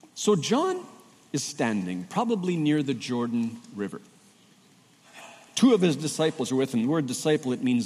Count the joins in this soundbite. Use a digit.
0